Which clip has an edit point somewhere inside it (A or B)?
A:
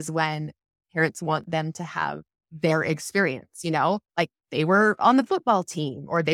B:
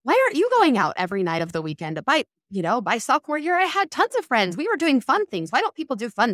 A